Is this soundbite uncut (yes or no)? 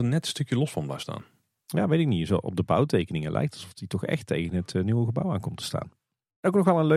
yes